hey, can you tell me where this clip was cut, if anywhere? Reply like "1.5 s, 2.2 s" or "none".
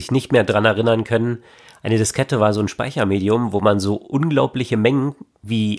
none